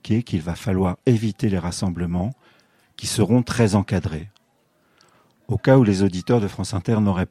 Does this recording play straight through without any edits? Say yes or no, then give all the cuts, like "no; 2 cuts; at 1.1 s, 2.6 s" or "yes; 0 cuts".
yes; 0 cuts